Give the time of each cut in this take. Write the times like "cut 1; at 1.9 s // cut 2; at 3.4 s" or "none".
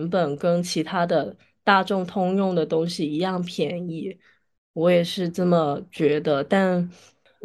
none